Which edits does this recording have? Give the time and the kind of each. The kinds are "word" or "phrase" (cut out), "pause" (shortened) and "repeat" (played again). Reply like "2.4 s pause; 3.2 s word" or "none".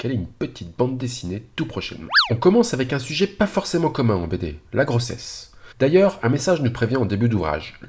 5.7 s pause